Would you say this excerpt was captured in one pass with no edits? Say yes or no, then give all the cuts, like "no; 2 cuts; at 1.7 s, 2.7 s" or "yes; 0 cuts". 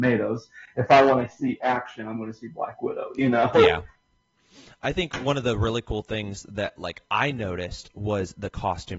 yes; 0 cuts